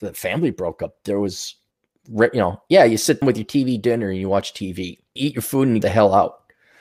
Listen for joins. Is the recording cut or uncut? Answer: cut